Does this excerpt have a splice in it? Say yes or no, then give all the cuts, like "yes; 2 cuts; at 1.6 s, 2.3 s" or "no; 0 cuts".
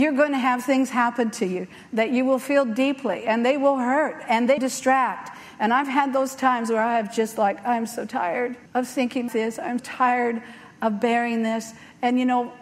yes; 4 cuts; at 4.6 s, 8.7 s, 9.3 s, 9.8 s